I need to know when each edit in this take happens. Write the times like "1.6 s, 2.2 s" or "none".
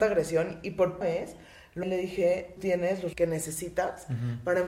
1.0 s, 1.8 s, 2.6 s, 3.1 s